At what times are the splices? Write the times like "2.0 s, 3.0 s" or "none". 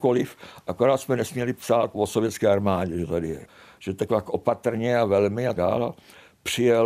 4.1 s, 5.5 s